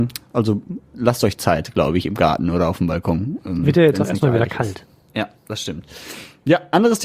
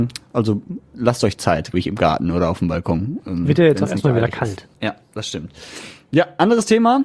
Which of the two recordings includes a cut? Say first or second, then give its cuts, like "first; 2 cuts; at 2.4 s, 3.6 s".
second; 2 cuts; at 1.7 s, 4.7 s